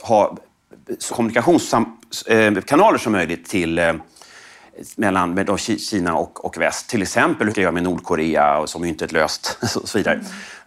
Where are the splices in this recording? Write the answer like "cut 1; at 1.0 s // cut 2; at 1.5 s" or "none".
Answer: cut 1; at 1.1 s // cut 2; at 6.4 s // cut 3; at 7.5 s